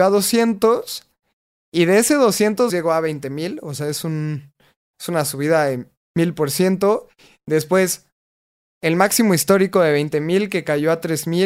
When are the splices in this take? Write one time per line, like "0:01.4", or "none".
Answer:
0:02.7